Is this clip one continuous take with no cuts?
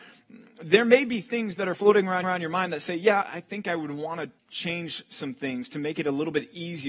no; 3 cuts; at 2.2 s, 3.2 s, 4.4 s

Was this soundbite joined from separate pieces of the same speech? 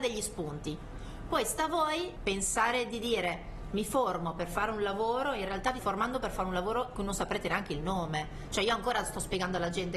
yes; 3 cuts; at 2.2 s, 5.8 s, 6.9 s

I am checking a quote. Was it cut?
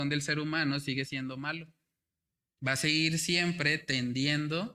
no; 0 cuts

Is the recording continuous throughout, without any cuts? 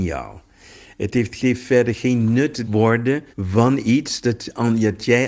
no; 3 cuts; at 1.4 s, 2.6 s, 3.3 s

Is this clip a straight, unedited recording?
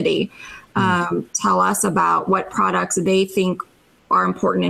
no; 1 cut; at 1.3 s

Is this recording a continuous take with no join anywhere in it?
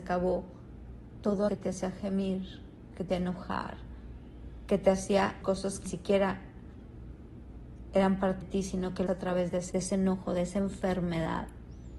no; 7 cuts; at 1.5 s, 3.1 s, 5.4 s, 5.9 s, 8.4 s, 9.1 s, 9.7 s

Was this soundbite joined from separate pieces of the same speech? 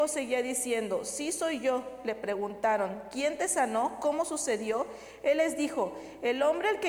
no; 0 cuts

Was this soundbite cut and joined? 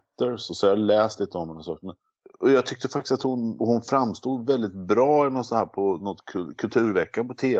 yes; 1 cut; at 3.6 s

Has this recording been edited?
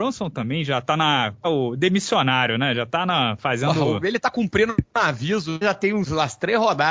yes; 2 cuts; at 1.4 s, 5.6 s

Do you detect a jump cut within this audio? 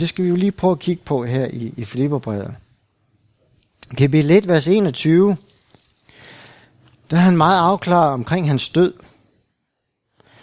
no; 0 cuts

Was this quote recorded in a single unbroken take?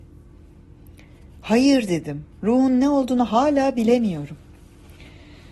no; 1 cut; at 2.3 s

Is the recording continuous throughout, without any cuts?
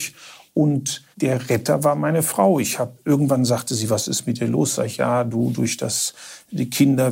no; 1 cut; at 1.1 s

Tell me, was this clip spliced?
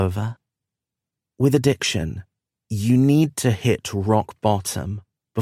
no; 0 cuts

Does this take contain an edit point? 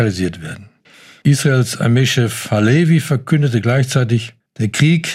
no; 0 cuts

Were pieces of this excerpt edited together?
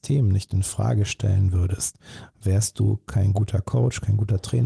no; 0 cuts

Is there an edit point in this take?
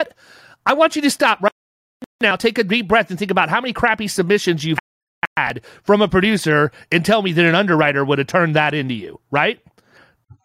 no; 0 cuts

